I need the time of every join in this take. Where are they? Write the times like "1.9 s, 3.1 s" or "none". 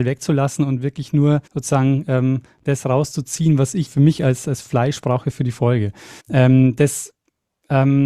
1.5 s, 3.9 s, 6.2 s